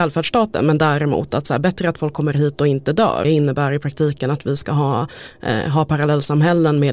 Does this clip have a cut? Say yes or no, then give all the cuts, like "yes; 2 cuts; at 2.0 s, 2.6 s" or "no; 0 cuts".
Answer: yes; 1 cut; at 3.2 s